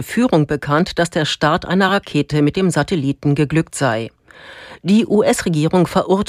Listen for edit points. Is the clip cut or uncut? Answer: uncut